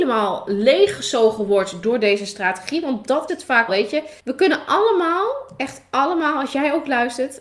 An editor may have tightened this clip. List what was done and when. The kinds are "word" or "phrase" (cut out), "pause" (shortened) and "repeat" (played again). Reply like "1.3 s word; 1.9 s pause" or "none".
3.3 s word; 3.7 s word; 4.2 s pause

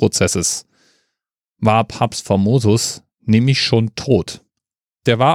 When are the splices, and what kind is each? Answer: 3.1 s pause

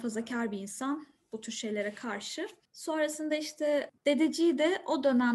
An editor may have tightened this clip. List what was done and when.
none

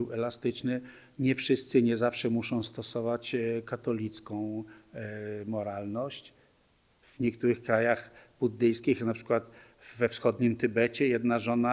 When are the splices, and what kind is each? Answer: none

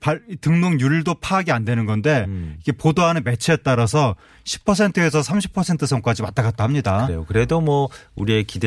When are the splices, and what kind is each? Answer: none

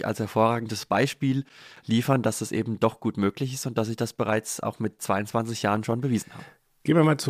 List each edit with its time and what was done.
none

